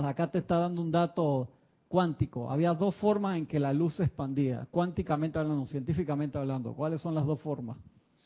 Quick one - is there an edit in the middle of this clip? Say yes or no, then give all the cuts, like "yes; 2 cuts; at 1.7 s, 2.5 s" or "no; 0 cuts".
no; 0 cuts